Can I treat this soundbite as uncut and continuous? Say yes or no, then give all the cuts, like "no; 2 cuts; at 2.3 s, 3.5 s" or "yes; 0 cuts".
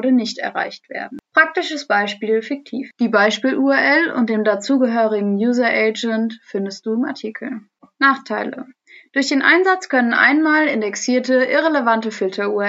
yes; 0 cuts